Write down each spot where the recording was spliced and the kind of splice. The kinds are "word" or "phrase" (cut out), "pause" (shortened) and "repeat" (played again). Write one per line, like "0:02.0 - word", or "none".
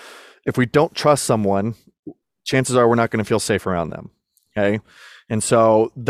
none